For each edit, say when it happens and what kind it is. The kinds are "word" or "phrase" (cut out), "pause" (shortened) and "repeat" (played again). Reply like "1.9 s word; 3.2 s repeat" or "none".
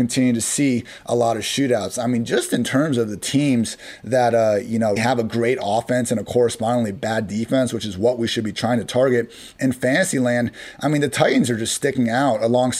5.0 s word